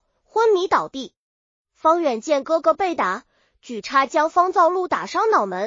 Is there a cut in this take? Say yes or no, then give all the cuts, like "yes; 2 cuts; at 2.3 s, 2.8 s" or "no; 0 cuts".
no; 0 cuts